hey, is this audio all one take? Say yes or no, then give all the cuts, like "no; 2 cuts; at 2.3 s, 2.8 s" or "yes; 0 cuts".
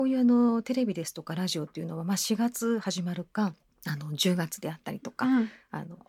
no; 1 cut; at 3.6 s